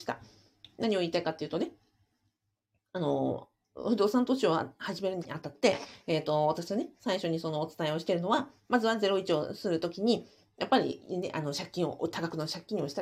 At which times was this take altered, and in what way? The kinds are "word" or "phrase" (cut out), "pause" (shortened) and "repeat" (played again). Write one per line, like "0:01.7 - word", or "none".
0:05.2 - word